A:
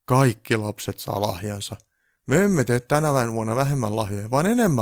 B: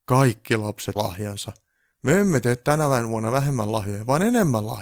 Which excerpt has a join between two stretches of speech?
B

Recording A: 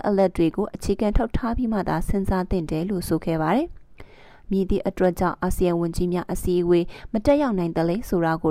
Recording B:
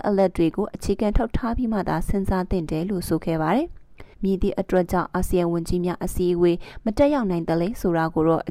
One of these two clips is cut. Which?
B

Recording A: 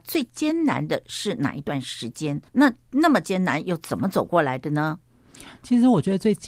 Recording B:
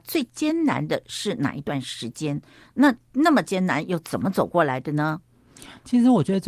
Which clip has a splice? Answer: A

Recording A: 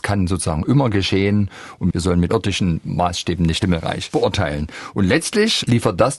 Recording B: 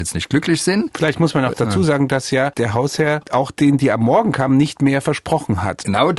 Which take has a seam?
A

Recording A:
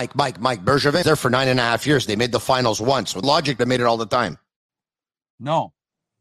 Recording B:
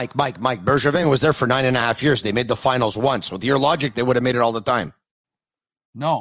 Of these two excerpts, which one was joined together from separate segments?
A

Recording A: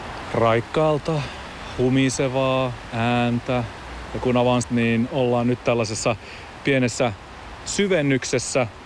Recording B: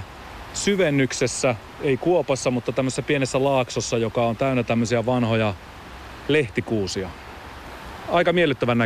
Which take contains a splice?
A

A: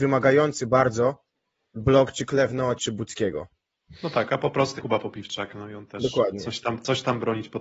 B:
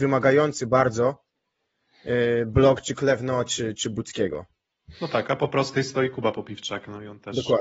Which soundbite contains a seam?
A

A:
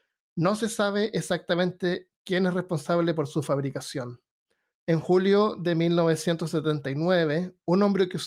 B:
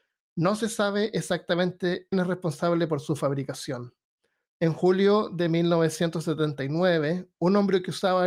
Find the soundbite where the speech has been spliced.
B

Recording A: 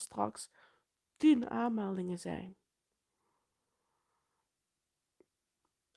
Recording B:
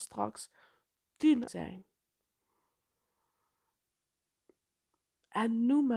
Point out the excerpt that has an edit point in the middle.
B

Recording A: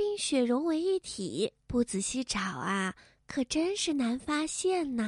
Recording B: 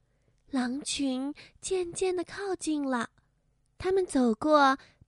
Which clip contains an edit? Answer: A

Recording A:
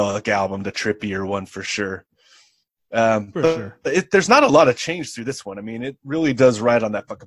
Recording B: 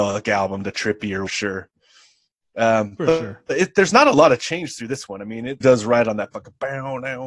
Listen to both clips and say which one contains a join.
B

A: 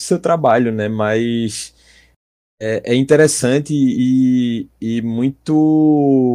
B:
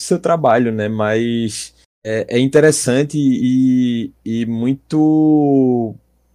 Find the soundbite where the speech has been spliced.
B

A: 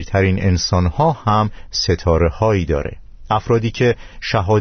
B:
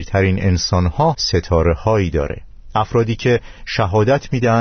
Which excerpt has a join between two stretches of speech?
B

